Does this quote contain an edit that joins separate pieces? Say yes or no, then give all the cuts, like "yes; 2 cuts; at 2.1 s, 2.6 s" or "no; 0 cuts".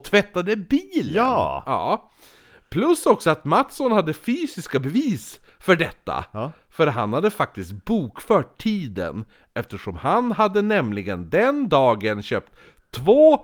no; 0 cuts